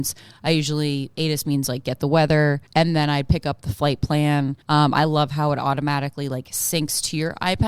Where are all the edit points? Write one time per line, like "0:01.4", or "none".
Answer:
0:02.7
0:04.6